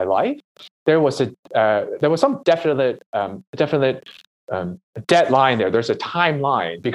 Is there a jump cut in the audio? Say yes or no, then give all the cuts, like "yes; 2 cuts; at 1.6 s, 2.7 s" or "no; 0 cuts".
no; 0 cuts